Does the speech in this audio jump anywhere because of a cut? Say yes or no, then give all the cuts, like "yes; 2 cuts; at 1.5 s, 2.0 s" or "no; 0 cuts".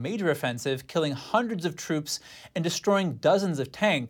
no; 0 cuts